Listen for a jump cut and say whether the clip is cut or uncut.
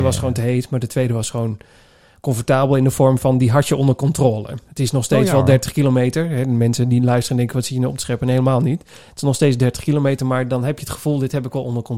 cut